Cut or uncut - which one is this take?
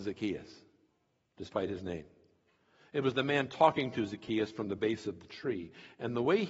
uncut